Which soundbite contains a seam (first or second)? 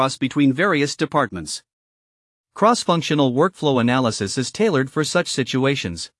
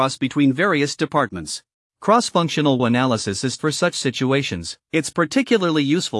second